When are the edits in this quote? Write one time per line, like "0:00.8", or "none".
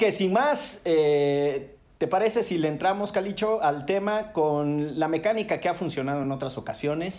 none